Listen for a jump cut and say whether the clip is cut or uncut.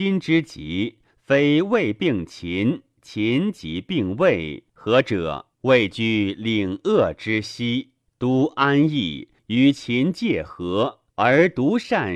cut